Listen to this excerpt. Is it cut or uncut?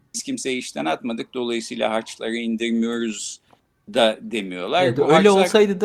uncut